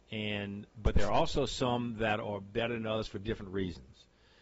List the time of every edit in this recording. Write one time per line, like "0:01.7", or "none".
none

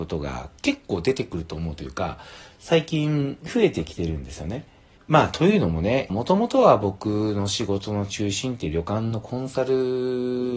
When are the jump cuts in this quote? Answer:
0:05.0
0:06.1

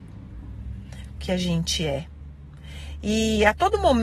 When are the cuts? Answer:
0:01.2

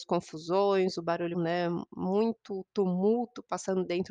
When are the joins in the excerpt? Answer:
0:01.3

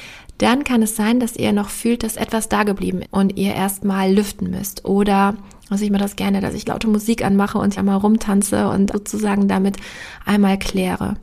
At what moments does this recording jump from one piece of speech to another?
0:03.0
0:06.6
0:07.8
0:08.9

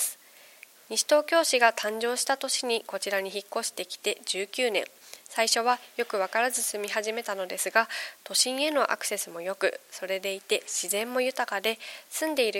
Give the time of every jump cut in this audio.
none

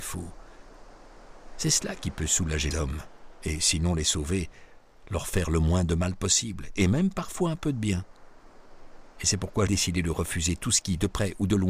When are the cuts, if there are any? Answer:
0:02.7
0:09.7

